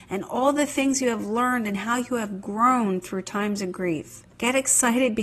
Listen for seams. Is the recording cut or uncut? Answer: cut